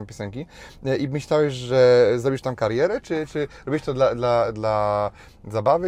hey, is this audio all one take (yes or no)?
yes